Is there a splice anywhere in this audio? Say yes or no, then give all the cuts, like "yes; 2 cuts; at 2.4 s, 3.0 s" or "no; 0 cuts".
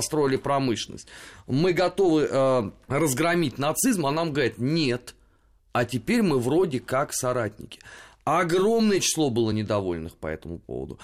no; 0 cuts